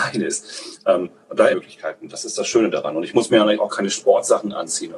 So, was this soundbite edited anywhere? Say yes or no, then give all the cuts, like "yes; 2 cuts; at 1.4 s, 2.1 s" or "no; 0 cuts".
yes; 1 cut; at 1.5 s